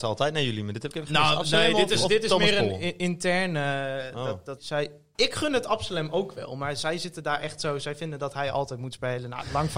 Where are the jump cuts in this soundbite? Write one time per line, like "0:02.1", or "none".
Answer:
0:04.6
0:05.1